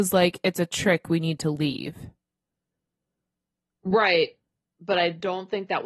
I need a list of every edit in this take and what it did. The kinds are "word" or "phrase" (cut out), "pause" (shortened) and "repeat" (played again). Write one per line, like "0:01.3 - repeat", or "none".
none